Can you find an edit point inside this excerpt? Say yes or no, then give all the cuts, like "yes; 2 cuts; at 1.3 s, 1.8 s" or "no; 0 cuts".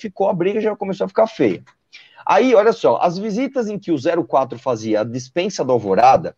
no; 0 cuts